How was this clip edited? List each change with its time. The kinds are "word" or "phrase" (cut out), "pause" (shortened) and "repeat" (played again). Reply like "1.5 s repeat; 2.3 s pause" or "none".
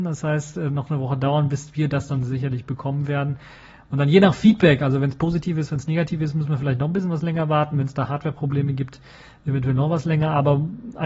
none